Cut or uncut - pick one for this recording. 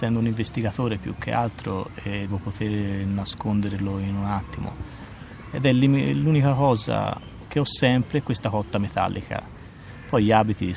cut